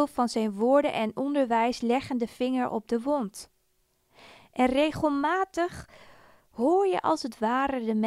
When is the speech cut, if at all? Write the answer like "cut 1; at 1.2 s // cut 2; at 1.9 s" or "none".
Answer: none